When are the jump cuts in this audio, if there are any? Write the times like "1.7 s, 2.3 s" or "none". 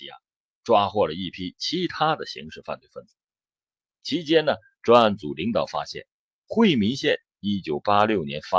none